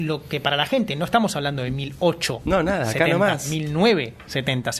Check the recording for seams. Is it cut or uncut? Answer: uncut